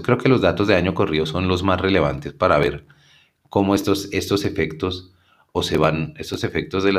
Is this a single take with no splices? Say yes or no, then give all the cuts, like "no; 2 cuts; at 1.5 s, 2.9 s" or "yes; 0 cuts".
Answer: yes; 0 cuts